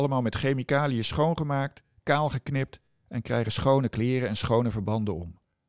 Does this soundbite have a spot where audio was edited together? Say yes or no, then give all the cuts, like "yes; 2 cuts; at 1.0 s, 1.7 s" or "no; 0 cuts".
no; 0 cuts